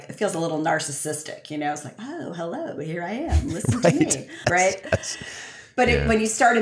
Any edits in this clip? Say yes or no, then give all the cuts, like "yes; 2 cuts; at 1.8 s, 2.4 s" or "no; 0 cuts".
yes; 1 cut; at 4.4 s